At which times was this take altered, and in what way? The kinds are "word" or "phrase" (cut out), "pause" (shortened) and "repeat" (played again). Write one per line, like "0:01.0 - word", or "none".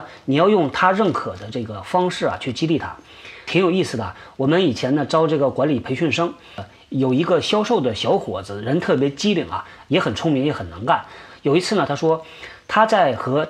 none

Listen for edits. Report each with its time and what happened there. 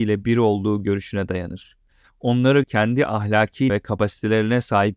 0:02.6 - word
0:03.7 - word

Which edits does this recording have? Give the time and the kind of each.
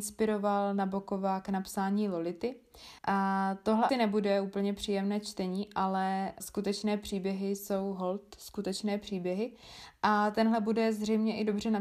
0:03.0 - pause
0:03.9 - word
0:06.4 - word

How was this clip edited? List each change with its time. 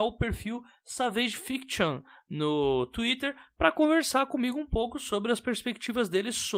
none

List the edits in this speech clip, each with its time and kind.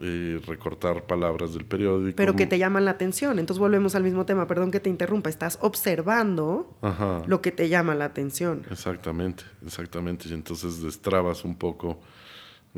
none

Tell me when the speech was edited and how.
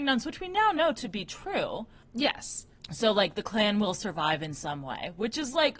none

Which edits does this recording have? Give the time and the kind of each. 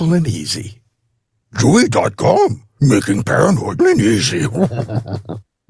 0:03.2 - word
0:03.8 - word

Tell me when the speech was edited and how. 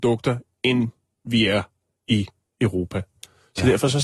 none

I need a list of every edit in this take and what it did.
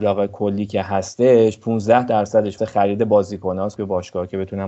0:02.6 - word
0:03.8 - word

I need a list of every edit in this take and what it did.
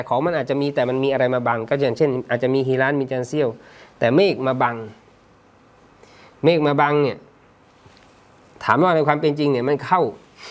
none

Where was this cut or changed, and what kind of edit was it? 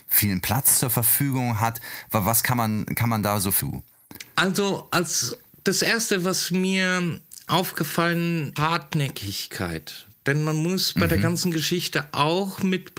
0:03.6 - phrase
0:08.6 - phrase

